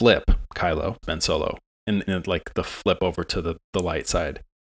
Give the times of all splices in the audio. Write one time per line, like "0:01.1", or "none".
0:01.0
0:02.1

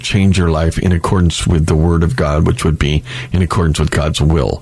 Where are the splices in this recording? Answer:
none

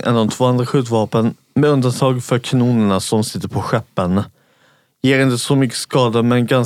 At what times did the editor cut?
none

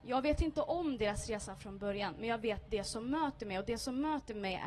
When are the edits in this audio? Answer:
none

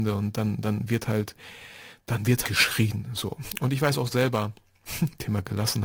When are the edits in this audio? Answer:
0:02.4

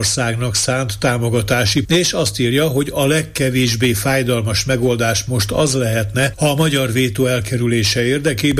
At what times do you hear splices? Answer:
0:01.8

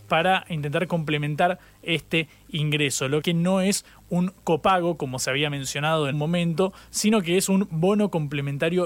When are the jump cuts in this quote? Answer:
0:03.2
0:06.1

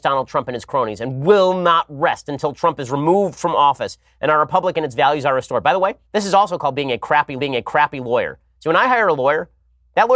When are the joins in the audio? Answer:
0:06.0
0:07.4

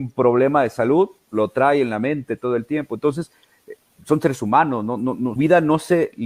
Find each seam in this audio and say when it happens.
0:05.4

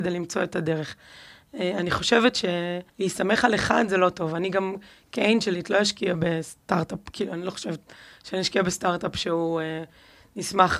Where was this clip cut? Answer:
0:02.9

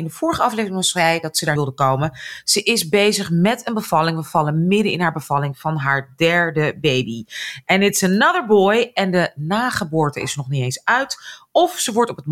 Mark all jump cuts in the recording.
0:01.6

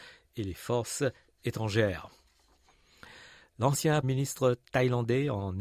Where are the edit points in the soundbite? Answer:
0:04.0

